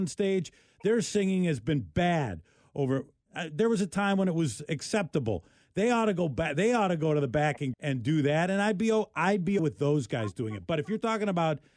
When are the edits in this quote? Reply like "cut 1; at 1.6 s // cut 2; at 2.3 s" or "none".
cut 1; at 7.7 s // cut 2; at 9.6 s